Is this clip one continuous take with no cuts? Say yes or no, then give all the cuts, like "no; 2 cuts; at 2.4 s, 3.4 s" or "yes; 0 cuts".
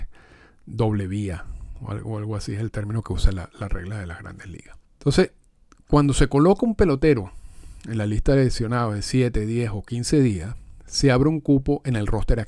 no; 1 cut; at 4.8 s